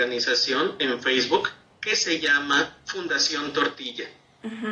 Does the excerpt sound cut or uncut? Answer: uncut